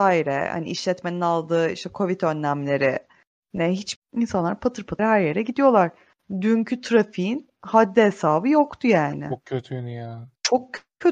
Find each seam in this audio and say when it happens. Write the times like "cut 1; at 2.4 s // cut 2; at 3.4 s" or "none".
cut 1; at 4.0 s // cut 2; at 5.0 s